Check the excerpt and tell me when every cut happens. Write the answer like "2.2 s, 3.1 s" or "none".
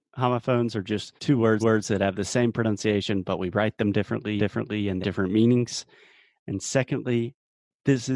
1.2 s, 1.6 s, 4.4 s, 5.0 s